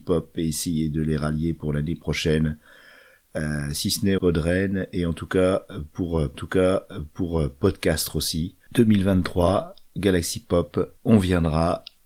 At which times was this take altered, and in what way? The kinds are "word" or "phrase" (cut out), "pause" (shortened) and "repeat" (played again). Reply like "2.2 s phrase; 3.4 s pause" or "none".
4.2 s phrase; 6.3 s repeat; 11.0 s pause